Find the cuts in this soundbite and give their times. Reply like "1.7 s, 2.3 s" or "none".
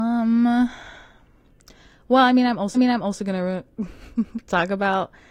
2.7 s